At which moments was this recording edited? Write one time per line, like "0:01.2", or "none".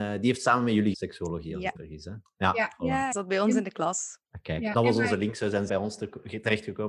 0:00.9
0:01.8
0:03.1
0:04.7
0:05.7